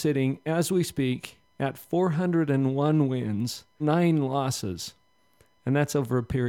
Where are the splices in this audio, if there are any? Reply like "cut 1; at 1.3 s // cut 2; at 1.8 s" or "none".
cut 1; at 3.8 s

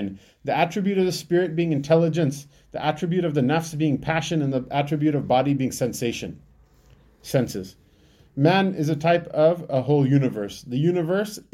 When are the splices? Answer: none

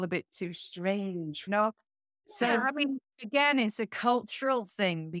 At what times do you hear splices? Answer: cut 1; at 1.5 s

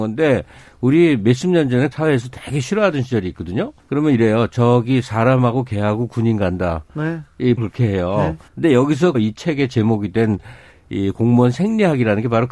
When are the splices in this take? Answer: cut 1; at 1.9 s // cut 2; at 3.8 s // cut 3; at 7.6 s // cut 4; at 8.5 s // cut 5; at 9.1 s

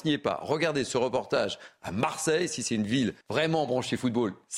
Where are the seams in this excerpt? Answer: cut 1; at 3.2 s

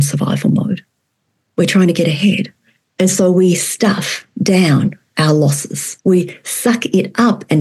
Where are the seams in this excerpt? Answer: cut 1; at 6.0 s

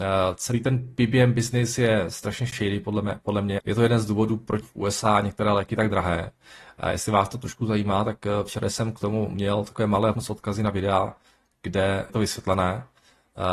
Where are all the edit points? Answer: cut 1; at 3.6 s // cut 2; at 4.6 s // cut 3; at 10.1 s // cut 4; at 12.1 s

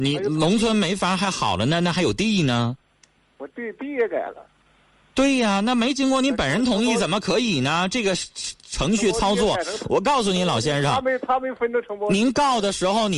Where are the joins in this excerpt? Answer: none

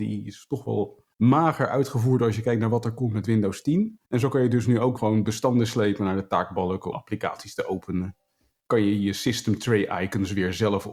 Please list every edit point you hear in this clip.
cut 1; at 1.1 s // cut 2; at 4.1 s // cut 3; at 5.0 s // cut 4; at 6.9 s

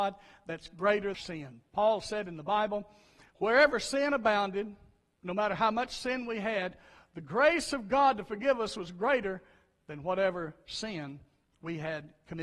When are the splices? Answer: cut 1; at 1.1 s

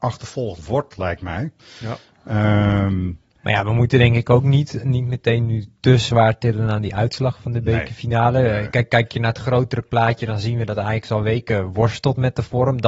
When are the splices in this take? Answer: none

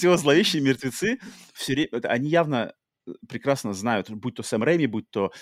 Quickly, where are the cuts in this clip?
cut 1; at 2.0 s

